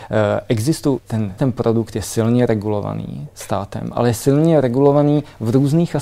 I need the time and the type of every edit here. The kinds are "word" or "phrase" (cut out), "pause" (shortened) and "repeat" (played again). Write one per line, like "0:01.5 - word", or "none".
0:01.0 - word
0:01.4 - word

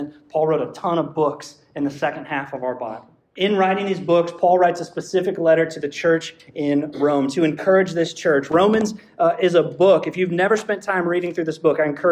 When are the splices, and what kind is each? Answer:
0:03.2 - pause

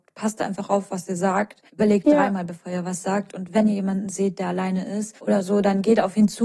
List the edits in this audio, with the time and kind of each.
0:01.7 - pause
0:05.2 - pause

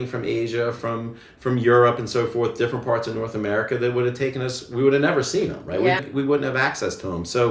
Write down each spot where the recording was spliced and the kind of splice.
0:06.0 - word

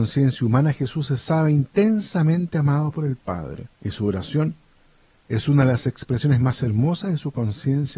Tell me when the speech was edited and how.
0:03.7 - pause

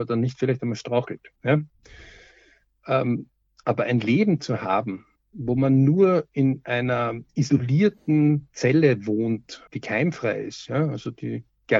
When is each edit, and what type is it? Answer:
0:01.4 - pause
0:05.2 - pause
0:07.3 - pause
0:09.7 - pause

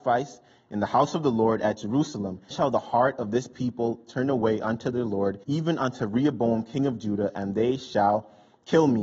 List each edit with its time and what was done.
0:02.5 - word
0:05.4 - pause

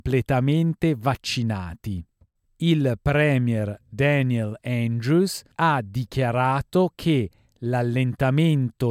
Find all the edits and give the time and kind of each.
0:02.4 - pause
0:05.5 - pause

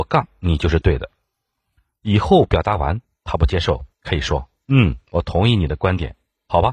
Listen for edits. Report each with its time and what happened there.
0:03.9 - pause

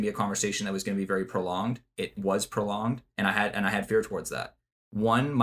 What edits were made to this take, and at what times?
none

